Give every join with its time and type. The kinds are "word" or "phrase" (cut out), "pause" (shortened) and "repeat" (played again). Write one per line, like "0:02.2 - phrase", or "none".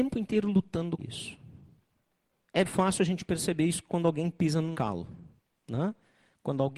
0:01.0 - word
0:02.6 - word
0:04.7 - word

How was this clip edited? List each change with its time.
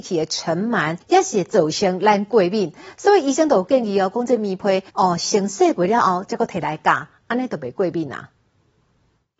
0:01.0 - pause
0:04.9 - pause

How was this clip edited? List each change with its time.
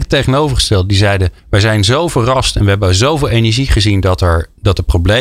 0:01.4 - pause

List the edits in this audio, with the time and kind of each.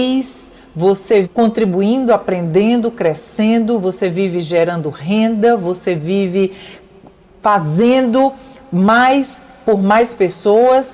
0:01.2 - word

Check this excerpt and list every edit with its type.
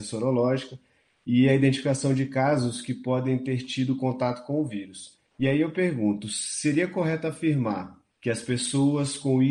0:05.3 - pause
0:08.1 - pause

